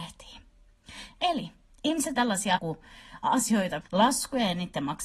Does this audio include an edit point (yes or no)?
yes